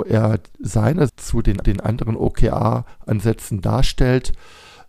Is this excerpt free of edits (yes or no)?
no